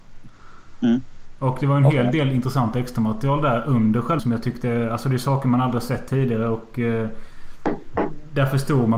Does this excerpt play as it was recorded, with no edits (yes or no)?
no